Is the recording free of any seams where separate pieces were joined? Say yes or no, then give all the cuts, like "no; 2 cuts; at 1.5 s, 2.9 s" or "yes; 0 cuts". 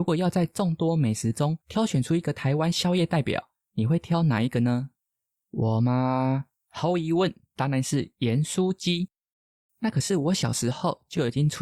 yes; 0 cuts